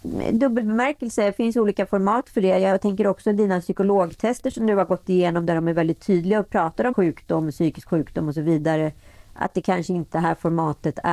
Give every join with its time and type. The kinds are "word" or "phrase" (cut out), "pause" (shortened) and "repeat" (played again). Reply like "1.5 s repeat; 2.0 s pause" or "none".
6.9 s word; 10.1 s word